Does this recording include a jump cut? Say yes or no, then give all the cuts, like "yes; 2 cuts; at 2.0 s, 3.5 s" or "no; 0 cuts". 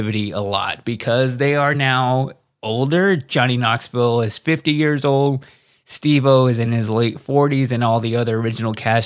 no; 0 cuts